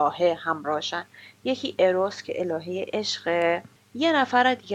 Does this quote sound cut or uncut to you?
uncut